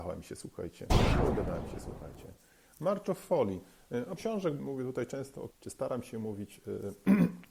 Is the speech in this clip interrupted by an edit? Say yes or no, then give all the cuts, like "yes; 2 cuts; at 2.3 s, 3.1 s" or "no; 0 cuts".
yes; 3 cuts; at 4.2 s, 4.6 s, 5.5 s